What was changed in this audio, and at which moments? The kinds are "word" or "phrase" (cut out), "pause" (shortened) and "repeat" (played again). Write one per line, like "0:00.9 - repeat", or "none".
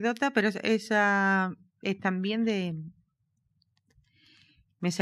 none